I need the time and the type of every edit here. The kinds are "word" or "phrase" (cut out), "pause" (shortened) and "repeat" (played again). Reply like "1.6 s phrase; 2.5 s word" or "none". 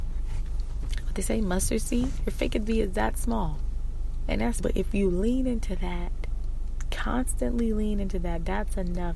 4.6 s phrase